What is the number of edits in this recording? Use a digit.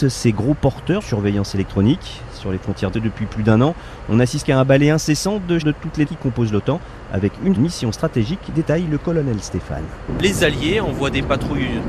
6